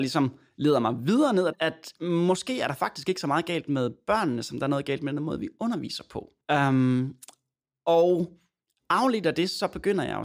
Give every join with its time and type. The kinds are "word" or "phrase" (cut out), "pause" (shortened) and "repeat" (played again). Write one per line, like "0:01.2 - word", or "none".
0:01.5 - phrase
0:06.4 - pause